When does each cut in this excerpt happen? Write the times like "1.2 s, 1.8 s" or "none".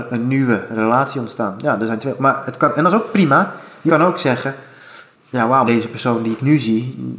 3.9 s, 5.2 s, 5.7 s

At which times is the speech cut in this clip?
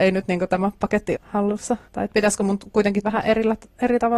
1.1 s, 1.9 s, 3.0 s

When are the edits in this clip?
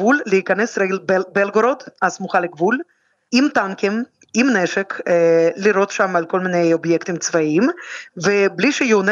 none

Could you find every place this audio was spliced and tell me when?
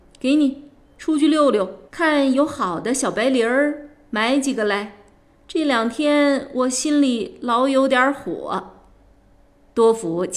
1.9 s

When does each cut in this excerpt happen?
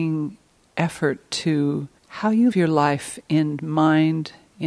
2.0 s, 2.5 s

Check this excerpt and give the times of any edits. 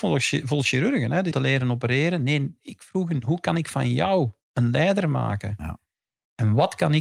1.3 s, 4.4 s

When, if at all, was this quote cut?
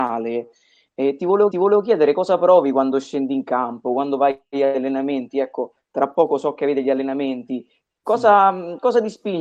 1.5 s

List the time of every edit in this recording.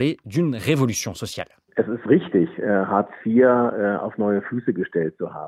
none

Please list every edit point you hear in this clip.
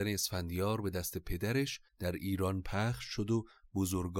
1.9 s

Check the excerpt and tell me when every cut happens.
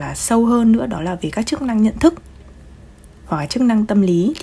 none

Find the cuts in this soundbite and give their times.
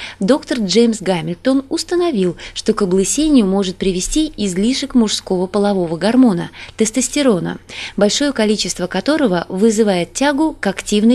none

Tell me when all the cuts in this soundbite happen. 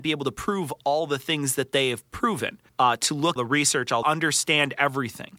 2.7 s, 3.4 s, 4.0 s

